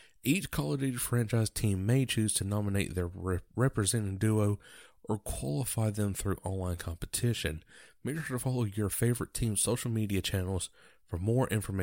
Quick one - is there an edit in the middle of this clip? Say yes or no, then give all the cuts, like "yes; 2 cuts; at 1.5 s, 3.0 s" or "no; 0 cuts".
no; 0 cuts